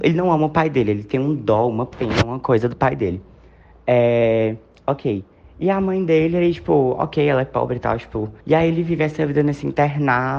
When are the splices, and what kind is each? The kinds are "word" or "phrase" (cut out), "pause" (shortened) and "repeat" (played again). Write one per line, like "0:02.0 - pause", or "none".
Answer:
0:08.4 - pause

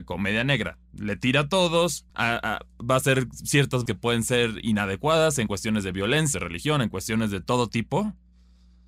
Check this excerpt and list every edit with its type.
0:02.1 - pause
0:03.9 - word
0:06.3 - phrase

